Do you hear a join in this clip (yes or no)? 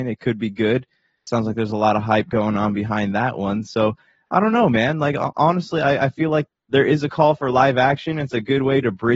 no